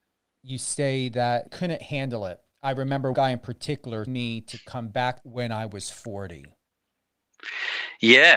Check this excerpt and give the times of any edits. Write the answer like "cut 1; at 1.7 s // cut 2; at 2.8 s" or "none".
cut 1; at 1.5 s // cut 2; at 3.1 s // cut 3; at 4.1 s // cut 4; at 5.2 s

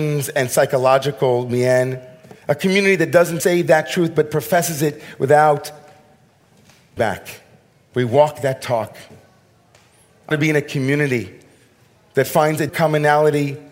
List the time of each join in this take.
cut 1; at 2.4 s // cut 2; at 3.4 s // cut 3; at 7.0 s // cut 4; at 10.3 s // cut 5; at 12.7 s

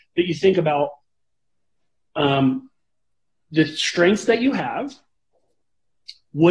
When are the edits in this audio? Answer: none

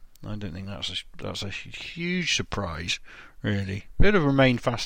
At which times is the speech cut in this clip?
none

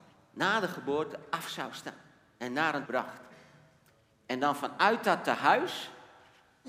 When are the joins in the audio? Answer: cut 1; at 2.9 s

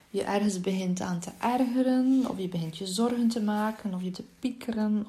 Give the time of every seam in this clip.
cut 1; at 4.1 s

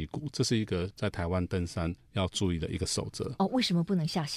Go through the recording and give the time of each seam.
cut 1; at 2.0 s

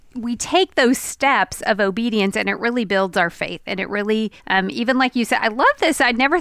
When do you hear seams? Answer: cut 1; at 4.4 s

